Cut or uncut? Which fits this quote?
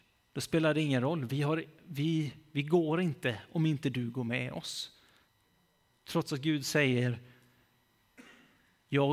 uncut